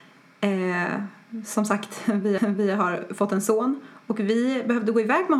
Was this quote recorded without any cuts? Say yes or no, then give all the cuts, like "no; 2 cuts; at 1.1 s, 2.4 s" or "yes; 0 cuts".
no; 1 cut; at 2.4 s